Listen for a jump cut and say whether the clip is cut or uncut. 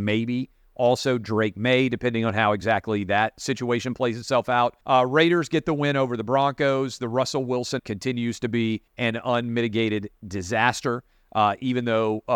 cut